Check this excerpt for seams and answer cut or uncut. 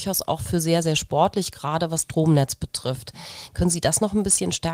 cut